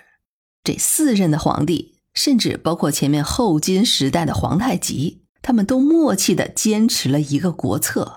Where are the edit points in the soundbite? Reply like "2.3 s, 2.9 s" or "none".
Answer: 2.1 s, 5.3 s